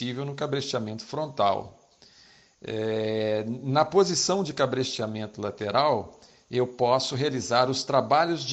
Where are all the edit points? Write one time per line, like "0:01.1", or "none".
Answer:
none